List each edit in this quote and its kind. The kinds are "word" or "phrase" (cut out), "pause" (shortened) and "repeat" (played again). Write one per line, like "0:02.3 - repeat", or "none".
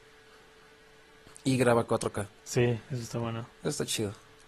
0:02.4 - pause
0:03.5 - pause